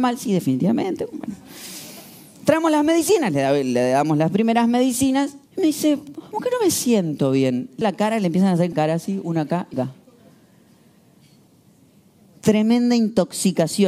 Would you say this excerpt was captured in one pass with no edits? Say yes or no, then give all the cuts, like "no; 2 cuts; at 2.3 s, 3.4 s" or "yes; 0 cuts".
no; 5 cuts; at 5.5 s, 6.3 s, 7.8 s, 8.7 s, 9.7 s